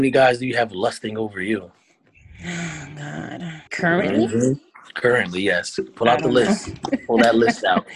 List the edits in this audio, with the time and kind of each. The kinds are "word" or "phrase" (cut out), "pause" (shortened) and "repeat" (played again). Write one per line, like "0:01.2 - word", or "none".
0:03.7 - pause